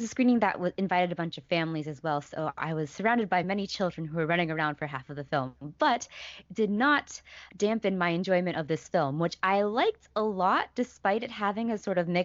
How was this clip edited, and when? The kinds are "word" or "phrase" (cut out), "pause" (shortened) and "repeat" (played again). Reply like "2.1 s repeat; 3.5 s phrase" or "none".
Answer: none